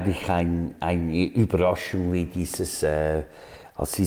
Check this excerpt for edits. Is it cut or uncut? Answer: uncut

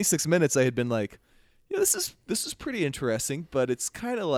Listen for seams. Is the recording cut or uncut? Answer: uncut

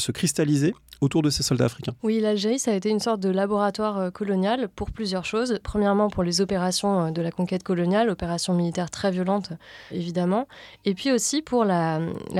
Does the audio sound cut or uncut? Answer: cut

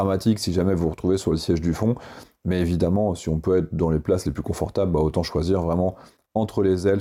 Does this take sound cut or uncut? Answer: uncut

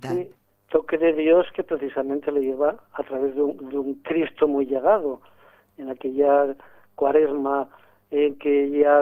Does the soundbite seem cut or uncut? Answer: uncut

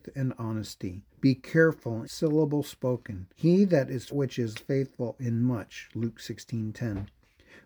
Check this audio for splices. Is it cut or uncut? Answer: cut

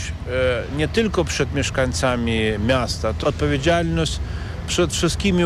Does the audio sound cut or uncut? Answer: cut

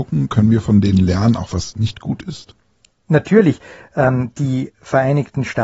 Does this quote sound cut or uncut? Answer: uncut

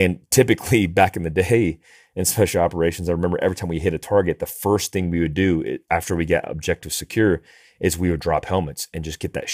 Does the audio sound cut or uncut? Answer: uncut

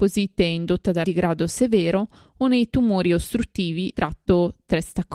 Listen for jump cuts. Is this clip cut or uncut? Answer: cut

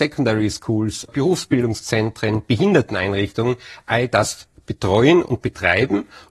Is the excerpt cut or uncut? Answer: cut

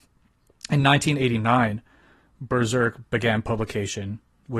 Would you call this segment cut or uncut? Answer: uncut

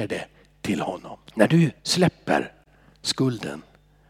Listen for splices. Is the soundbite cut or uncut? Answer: cut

